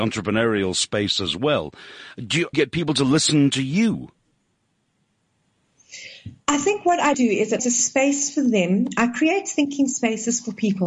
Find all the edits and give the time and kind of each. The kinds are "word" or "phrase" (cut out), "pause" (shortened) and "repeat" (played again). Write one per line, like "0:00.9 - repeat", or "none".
0:02.5 - phrase
0:06.4 - pause
0:07.1 - word
0:07.6 - phrase